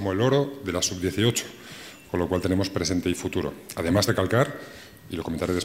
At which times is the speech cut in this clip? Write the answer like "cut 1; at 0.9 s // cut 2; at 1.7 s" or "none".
cut 1; at 4.1 s